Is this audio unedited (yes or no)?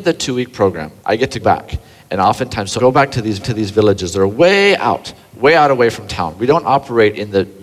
no